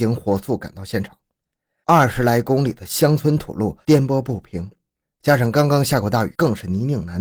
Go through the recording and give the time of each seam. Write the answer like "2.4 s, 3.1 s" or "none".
none

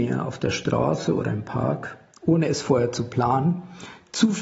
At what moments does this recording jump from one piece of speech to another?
none

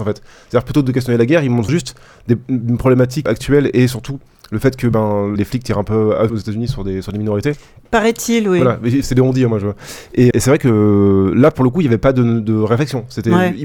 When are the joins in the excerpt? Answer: 1.7 s, 3.3 s, 5.4 s, 6.3 s, 9.0 s, 10.3 s

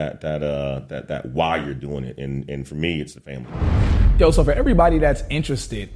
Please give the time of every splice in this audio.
none

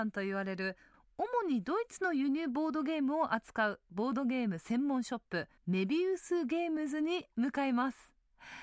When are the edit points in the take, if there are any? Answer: 5.6 s

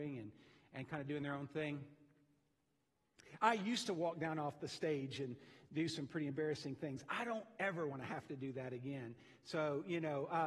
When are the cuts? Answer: none

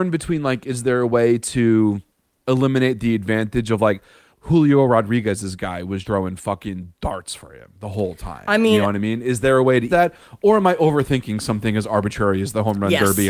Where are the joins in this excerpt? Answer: 4.3 s, 6.0 s, 9.9 s

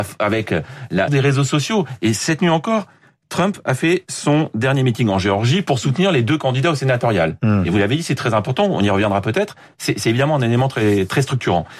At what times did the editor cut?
1.1 s

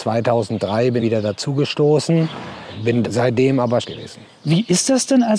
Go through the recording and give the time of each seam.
1.0 s, 3.0 s, 3.8 s

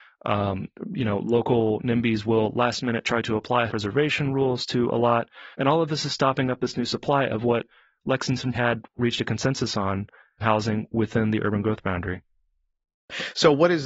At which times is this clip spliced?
3.7 s, 5.5 s, 8.5 s, 10.4 s

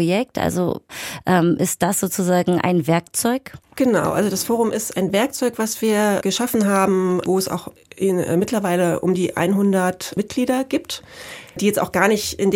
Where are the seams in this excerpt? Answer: 3.6 s

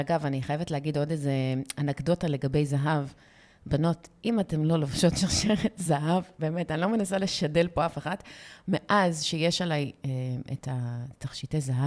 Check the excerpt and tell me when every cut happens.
none

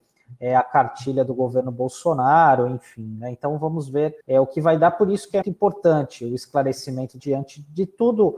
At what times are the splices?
4.2 s, 5.4 s, 7.2 s

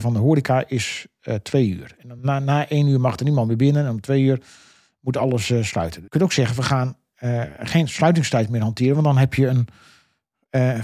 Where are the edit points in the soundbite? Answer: none

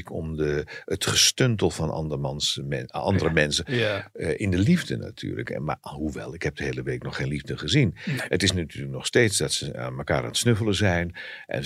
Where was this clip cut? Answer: none

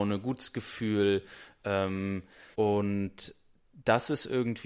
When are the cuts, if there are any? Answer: 2.5 s

